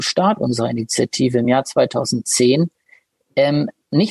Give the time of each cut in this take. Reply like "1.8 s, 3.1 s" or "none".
none